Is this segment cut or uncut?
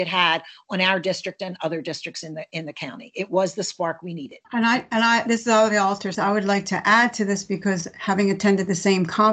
cut